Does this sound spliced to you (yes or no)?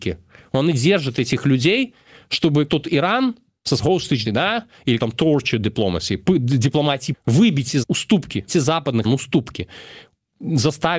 yes